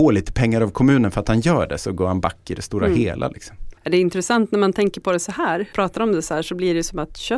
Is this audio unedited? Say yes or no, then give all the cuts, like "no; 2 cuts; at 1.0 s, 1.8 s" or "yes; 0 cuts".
no; 2 cuts; at 3.8 s, 5.7 s